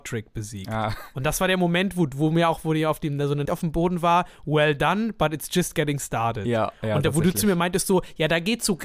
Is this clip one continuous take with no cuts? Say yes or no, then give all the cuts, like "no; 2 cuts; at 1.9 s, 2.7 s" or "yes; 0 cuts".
no; 1 cut; at 3.4 s